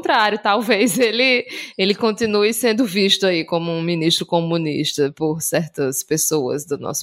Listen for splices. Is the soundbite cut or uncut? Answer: uncut